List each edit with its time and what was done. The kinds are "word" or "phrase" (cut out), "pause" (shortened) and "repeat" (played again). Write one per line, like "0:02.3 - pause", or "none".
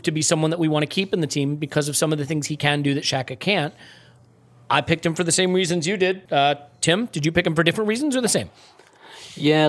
0:06.2 - pause